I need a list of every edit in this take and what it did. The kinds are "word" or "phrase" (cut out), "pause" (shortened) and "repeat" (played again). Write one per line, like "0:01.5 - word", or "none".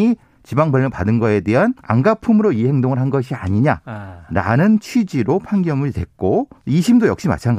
0:01.8 - pause
0:06.6 - pause